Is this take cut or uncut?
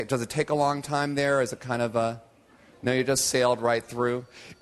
uncut